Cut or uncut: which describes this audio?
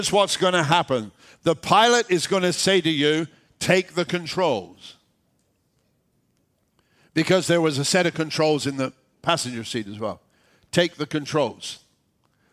uncut